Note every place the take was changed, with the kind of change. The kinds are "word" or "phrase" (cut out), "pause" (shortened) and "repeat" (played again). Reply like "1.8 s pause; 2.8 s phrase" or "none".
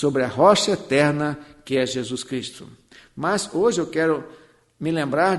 none